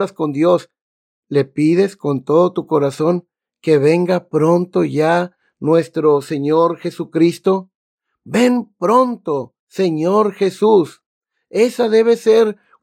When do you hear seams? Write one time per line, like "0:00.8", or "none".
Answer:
0:09.6

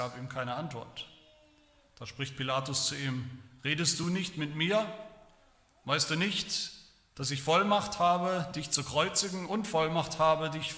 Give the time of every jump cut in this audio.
none

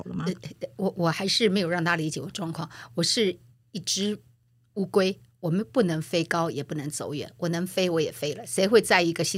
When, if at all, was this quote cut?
none

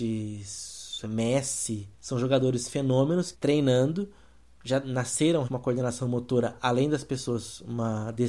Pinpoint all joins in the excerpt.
0:01.0
0:01.9
0:03.3
0:05.4

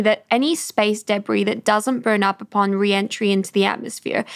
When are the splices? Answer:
none

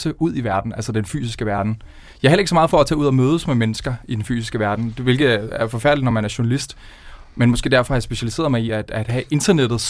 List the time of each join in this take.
none

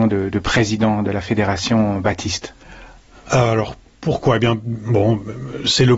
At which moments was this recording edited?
none

